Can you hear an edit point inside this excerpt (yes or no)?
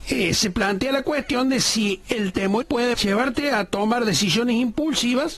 yes